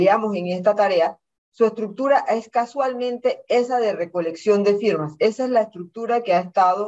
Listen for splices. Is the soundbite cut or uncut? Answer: uncut